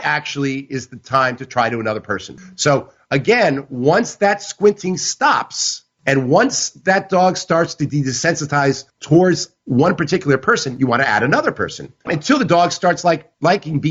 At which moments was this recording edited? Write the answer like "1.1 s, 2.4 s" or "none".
none